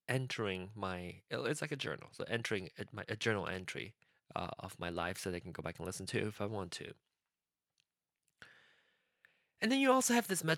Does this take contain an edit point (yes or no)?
yes